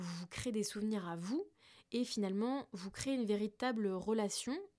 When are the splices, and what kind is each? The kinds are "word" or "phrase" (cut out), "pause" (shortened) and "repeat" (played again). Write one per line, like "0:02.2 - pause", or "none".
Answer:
none